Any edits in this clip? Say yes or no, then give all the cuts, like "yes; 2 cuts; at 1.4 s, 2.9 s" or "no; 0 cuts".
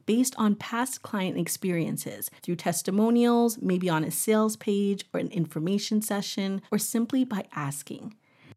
yes; 2 cuts; at 2.4 s, 6.7 s